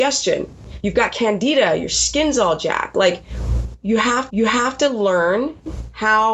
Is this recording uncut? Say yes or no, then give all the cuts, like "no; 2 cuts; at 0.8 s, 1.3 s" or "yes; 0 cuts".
no; 1 cut; at 4.3 s